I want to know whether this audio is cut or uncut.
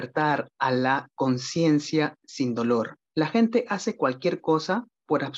cut